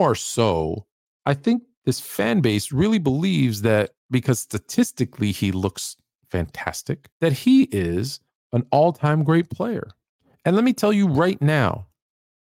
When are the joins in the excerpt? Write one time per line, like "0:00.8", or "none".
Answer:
0:04.0
0:07.1
0:08.4
0:10.2